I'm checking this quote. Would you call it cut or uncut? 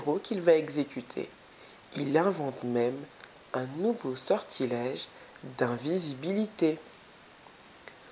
uncut